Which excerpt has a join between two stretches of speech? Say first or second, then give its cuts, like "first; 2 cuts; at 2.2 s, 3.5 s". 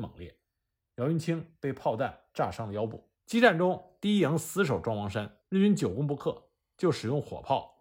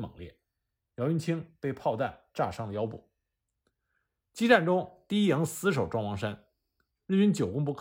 first; 2 cuts; at 3.1 s, 5.4 s